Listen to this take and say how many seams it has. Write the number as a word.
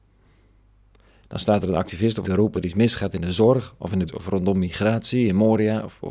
three